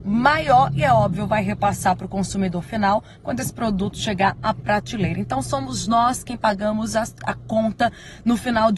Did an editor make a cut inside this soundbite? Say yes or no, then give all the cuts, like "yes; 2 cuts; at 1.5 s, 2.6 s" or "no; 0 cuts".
no; 0 cuts